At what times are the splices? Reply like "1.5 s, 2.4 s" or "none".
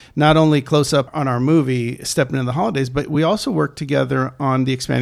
none